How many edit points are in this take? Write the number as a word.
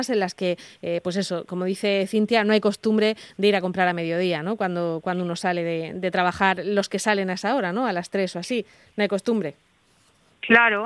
zero